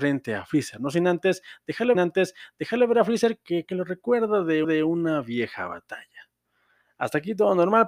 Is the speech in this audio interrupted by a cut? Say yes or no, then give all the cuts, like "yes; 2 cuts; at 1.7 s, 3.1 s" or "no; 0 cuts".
yes; 3 cuts; at 1.9 s, 3.6 s, 4.6 s